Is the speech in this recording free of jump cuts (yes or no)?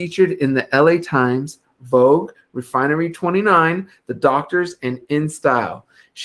yes